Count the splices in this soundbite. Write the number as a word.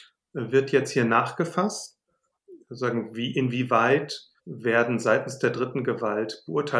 one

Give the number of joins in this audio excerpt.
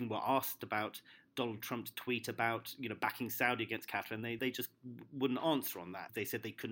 zero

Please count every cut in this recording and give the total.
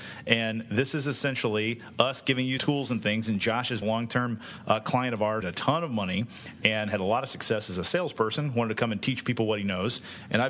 three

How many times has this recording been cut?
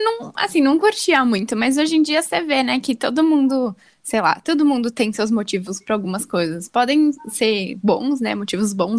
zero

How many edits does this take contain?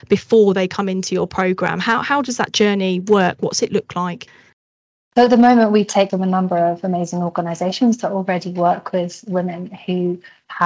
one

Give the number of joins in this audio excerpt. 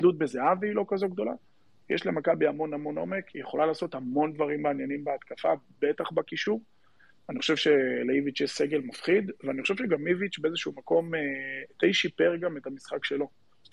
zero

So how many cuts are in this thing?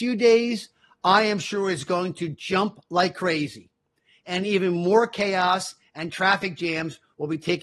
zero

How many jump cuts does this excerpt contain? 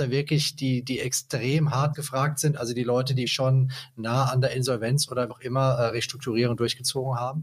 three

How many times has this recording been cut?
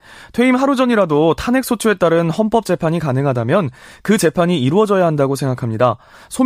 zero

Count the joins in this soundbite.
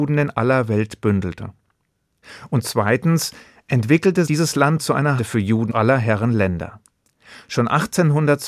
four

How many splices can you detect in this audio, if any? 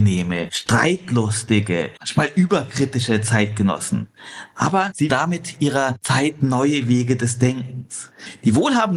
one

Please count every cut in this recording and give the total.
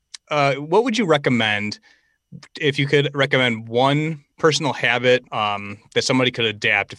two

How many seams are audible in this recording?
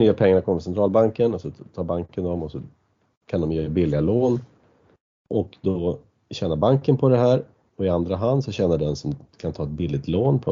zero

